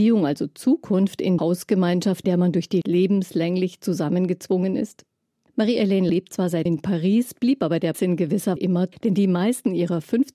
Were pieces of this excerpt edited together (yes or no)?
yes